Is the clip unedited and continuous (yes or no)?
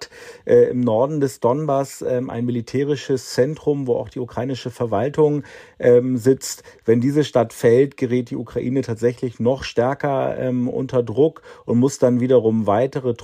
yes